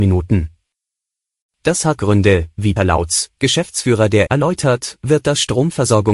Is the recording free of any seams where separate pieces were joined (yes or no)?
no